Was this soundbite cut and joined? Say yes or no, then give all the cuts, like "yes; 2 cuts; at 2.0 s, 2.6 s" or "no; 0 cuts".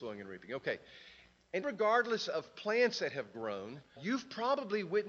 yes; 2 cuts; at 1.6 s, 4.0 s